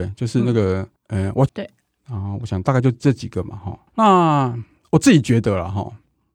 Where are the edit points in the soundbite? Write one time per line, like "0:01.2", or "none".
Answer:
0:01.0
0:01.5
0:03.9